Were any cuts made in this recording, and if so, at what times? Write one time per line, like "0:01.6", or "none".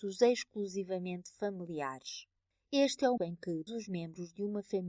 0:03.2
0:03.7